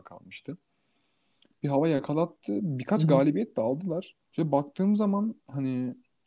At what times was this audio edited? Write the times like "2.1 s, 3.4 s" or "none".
4.2 s

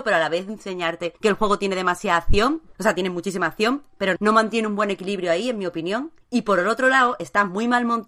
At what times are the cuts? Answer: 1.2 s, 2.7 s, 4.2 s, 6.2 s

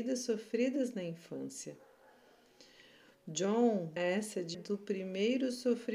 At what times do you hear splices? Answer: 4.0 s, 4.5 s

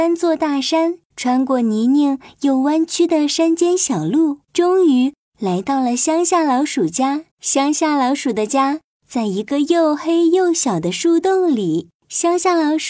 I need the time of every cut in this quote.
1.1 s, 4.5 s, 7.3 s, 12.0 s

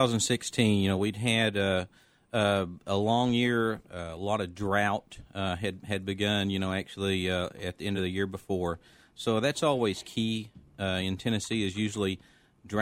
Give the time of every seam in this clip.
none

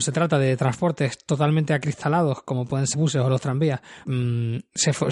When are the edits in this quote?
2.9 s, 4.0 s

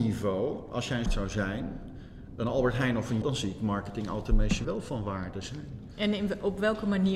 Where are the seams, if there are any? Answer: 1.1 s, 3.2 s, 4.6 s

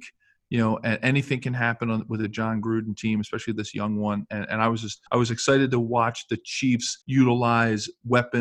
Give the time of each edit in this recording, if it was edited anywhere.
5.1 s, 7.0 s

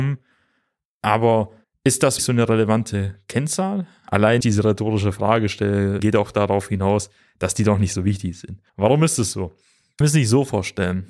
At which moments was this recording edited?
1.6 s, 2.2 s, 4.4 s, 6.0 s, 8.7 s, 10.0 s

